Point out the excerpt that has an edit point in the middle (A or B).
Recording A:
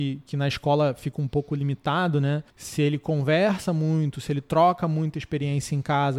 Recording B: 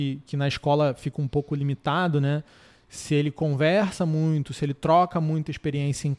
A